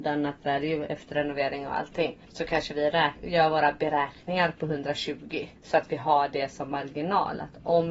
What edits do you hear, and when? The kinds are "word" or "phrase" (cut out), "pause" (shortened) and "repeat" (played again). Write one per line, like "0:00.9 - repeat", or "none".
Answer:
0:02.2 - pause
0:05.6 - pause